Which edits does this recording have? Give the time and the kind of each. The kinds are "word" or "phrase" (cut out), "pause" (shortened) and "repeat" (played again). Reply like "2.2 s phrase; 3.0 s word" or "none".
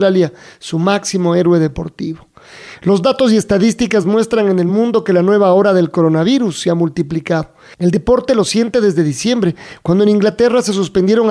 none